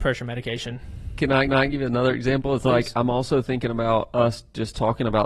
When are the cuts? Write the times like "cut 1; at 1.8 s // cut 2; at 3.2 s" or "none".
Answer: cut 1; at 1.5 s